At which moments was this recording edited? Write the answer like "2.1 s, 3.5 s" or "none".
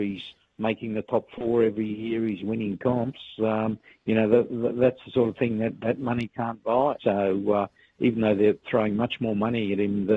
7.0 s